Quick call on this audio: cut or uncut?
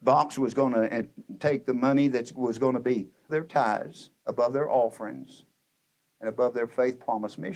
cut